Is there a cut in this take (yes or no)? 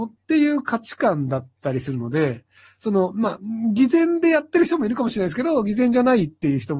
no